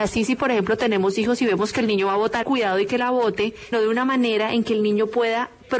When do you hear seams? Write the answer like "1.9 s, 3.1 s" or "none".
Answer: 2.4 s, 3.7 s